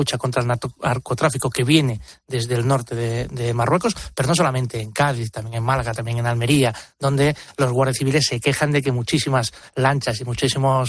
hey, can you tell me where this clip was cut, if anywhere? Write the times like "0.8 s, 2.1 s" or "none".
none